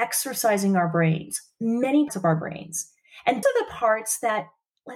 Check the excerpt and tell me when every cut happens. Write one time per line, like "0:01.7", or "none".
0:02.1
0:03.4